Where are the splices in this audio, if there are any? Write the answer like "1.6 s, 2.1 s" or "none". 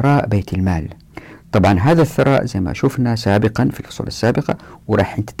none